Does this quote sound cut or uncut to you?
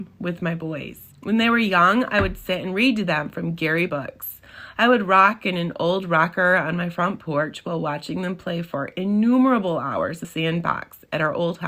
cut